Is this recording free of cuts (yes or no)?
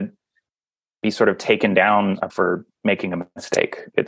no